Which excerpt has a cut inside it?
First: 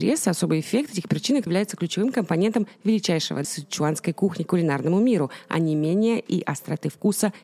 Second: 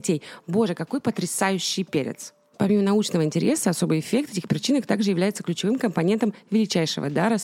first; 2 cuts; at 1.5 s, 3.4 s

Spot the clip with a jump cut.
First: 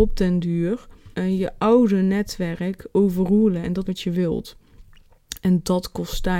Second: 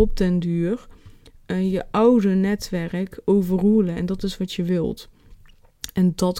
first; 2 cuts; at 1.1 s, 3.8 s

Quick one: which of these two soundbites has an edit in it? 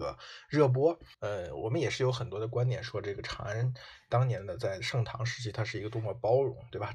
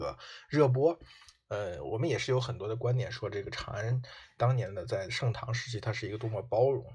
first; 1 cut; at 1.1 s

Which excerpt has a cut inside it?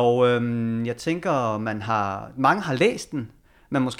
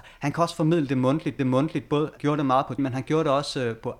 second; 3 cuts; at 1.4 s, 2.2 s, 2.8 s

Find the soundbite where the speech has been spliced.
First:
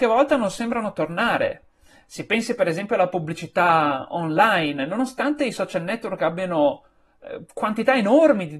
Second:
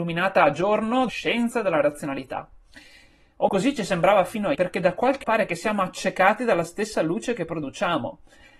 second; 4 cuts; at 1.1 s, 3.5 s, 4.5 s, 5.2 s

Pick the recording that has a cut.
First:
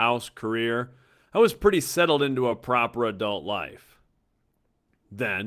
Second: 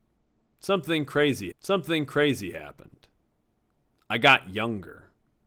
second; 1 cut; at 1.5 s

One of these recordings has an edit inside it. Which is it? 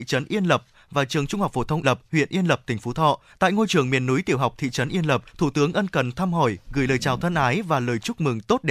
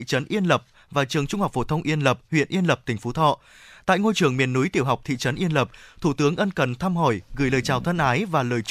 first; 3 cuts; at 1.8 s, 3.3 s, 5.3 s

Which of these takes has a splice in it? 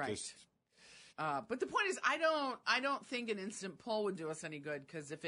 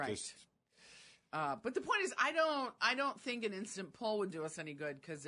first; 1 cut; at 1.1 s

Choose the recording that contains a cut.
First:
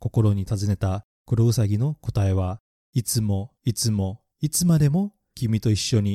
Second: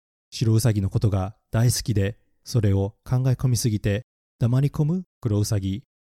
first; 2 cuts; at 2.7 s, 3.6 s

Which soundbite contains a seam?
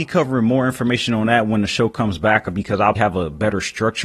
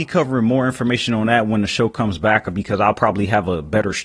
first; 1 cut; at 2.9 s

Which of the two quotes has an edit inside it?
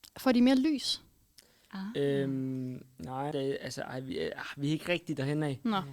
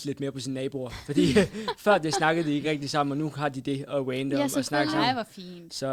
first; 1 cut; at 3.3 s

